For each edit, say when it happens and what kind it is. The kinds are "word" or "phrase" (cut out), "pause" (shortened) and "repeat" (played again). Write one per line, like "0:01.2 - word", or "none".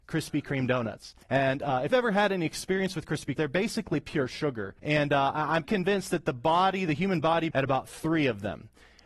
0:01.2 - pause
0:01.9 - word
0:03.4 - phrase
0:04.8 - pause
0:05.6 - word
0:07.5 - phrase